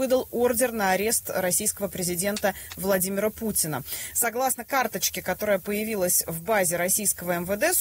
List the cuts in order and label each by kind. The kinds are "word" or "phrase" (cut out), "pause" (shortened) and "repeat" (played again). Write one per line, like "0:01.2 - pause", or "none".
none